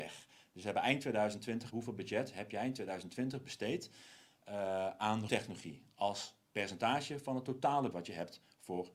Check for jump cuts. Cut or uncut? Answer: cut